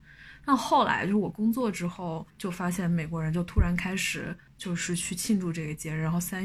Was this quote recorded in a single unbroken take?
no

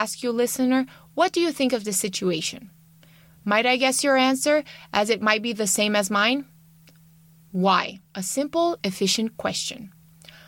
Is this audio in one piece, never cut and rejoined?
no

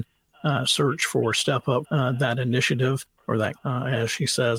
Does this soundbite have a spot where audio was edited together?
yes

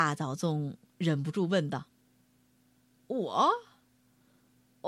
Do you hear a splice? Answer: no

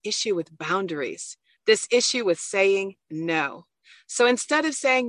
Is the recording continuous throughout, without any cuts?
yes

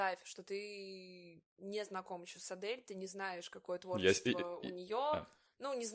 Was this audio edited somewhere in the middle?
no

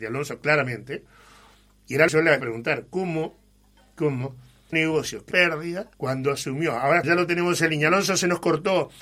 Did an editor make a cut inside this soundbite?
yes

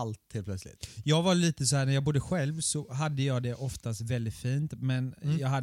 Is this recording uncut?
yes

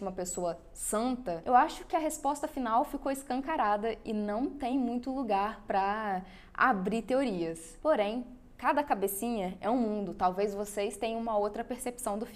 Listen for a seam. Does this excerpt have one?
no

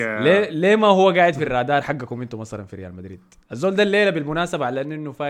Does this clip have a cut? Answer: no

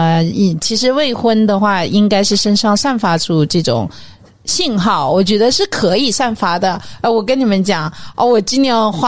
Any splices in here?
no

